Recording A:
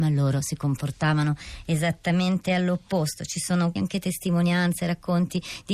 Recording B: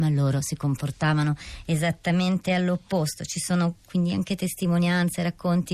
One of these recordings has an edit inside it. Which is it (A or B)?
A